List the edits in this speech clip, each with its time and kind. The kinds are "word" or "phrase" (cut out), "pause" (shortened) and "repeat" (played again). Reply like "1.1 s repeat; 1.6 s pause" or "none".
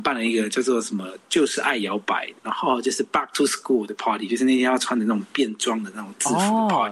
2.4 s pause